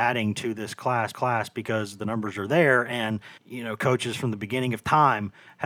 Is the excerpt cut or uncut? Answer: cut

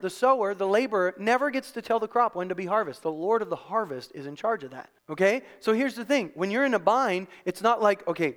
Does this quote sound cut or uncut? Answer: cut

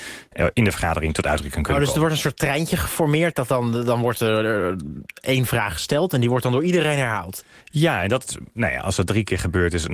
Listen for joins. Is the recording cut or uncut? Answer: uncut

